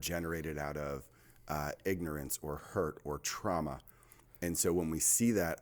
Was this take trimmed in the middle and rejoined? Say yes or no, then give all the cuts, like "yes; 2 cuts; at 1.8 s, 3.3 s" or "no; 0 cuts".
no; 0 cuts